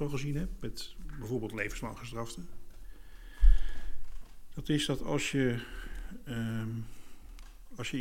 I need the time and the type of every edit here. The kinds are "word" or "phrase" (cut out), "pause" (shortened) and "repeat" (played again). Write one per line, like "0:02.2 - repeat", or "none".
none